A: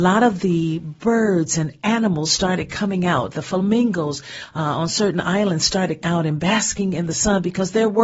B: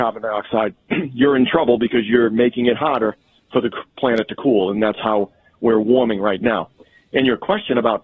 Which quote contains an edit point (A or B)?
A